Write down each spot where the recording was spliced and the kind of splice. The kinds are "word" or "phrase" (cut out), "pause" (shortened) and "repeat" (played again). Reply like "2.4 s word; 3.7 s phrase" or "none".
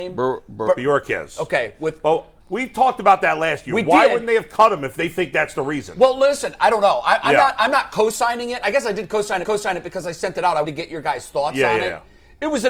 2.4 s pause; 9.4 s repeat; 10.6 s word